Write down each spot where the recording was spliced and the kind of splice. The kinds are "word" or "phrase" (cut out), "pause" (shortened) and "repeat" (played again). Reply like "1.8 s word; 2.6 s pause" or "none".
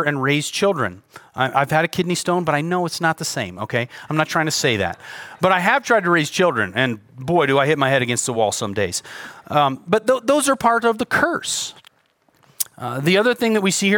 none